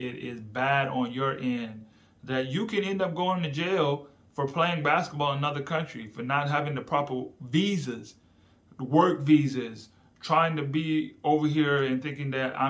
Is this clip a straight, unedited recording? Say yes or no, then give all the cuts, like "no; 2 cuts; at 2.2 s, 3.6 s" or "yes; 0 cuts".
yes; 0 cuts